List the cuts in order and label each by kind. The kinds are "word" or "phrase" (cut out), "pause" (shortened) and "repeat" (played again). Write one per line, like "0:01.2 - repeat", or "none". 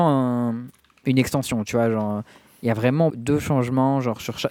0:03.1 - word

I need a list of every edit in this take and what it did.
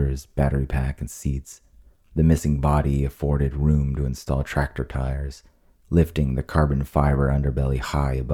none

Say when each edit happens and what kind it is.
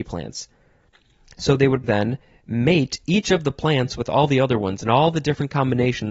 0:01.8 - word

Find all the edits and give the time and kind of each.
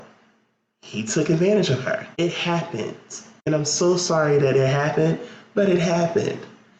0:02.1 - pause

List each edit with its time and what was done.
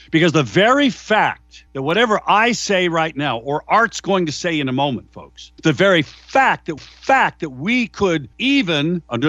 0:01.7 - pause
0:05.6 - pause
0:06.8 - repeat
0:08.3 - pause

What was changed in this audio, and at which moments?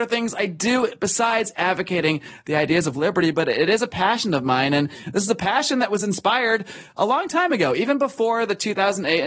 none

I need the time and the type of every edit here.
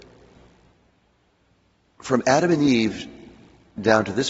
none

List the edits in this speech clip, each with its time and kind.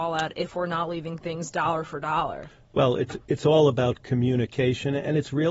none

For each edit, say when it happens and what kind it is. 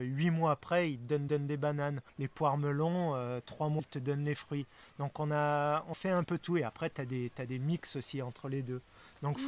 0:01.3 - repeat
0:02.1 - pause
0:03.8 - word
0:05.9 - word
0:06.2 - word

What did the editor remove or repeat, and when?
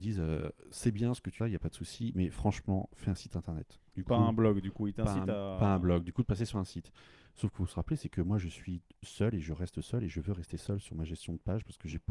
0:01.4 - phrase
0:03.9 - pause

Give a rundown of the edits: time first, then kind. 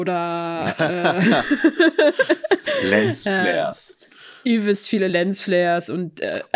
none

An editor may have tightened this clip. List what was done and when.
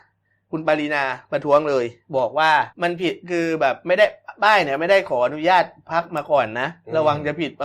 0:02.7 - pause

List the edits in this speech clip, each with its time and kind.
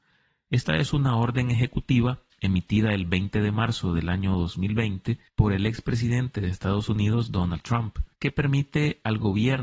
0:02.3 - pause
0:05.3 - pause
0:08.1 - pause

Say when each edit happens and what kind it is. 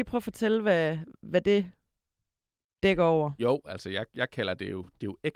none

